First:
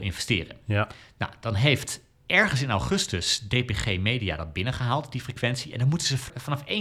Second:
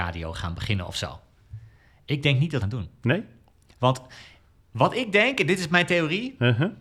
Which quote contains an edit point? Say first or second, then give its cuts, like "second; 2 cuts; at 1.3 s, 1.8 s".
second; 1 cut; at 2.6 s